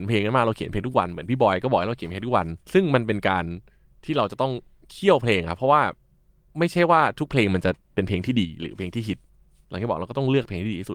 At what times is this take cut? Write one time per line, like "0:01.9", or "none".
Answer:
0:02.6